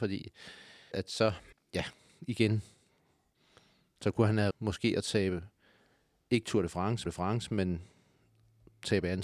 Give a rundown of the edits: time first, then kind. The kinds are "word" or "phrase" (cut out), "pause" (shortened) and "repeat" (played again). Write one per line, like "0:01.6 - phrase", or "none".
0:00.9 - word
0:01.5 - pause
0:04.5 - word
0:07.1 - repeat